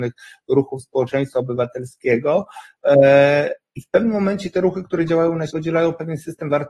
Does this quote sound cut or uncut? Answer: cut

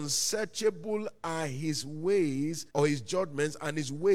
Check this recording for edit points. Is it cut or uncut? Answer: cut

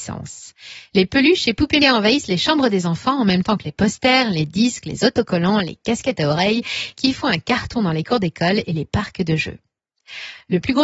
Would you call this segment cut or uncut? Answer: cut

